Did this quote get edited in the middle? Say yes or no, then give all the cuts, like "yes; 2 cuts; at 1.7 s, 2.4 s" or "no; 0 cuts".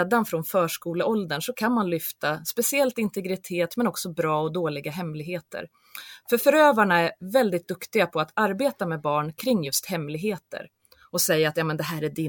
no; 0 cuts